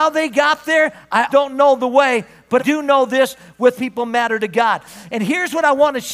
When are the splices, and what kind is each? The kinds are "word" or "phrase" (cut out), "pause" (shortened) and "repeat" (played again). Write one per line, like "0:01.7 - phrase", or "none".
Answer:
0:01.3 - word
0:02.6 - word
0:03.8 - phrase